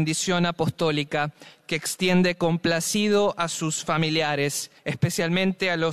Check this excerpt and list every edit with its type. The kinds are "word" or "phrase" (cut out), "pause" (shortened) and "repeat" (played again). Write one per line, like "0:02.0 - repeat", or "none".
0:04.8 - pause